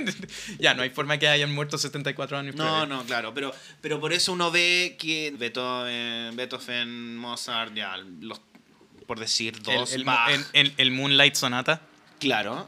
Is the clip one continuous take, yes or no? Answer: no